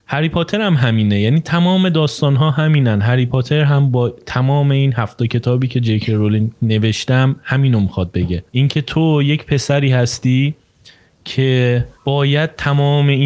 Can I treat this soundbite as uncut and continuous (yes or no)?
no